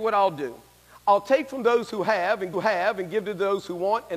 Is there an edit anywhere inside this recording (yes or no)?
yes